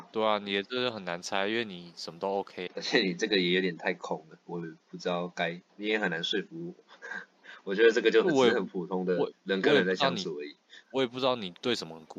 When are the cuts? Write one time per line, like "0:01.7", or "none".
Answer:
0:02.7
0:05.7
0:10.8